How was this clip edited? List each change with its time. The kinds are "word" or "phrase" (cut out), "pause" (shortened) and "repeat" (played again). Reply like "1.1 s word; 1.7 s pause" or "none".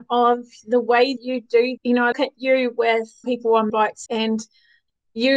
1.2 s word; 1.8 s word; 2.1 s word; 3.2 s word; 3.7 s word; 4.1 s word

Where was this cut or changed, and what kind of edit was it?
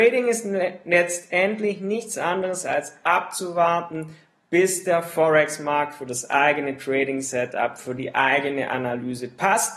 none

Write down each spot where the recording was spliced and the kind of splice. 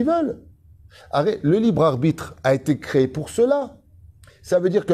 none

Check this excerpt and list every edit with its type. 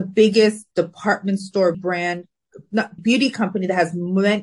1.7 s word; 3.0 s word

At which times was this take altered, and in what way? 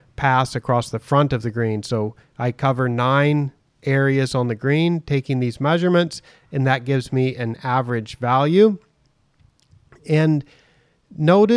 none

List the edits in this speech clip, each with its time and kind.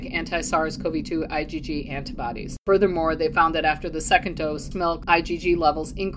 4.7 s word

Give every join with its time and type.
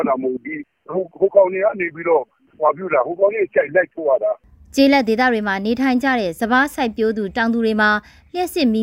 none

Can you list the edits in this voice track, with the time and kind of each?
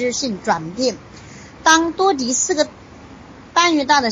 1.5 s pause

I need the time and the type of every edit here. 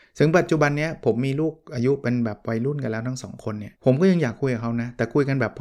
3.8 s pause

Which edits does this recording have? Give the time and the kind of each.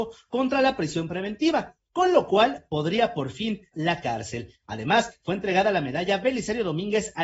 3.7 s word

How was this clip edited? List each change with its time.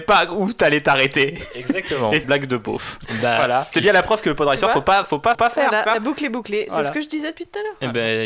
2.2 s phrase; 5.3 s repeat

